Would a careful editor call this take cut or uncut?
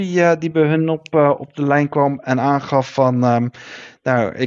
uncut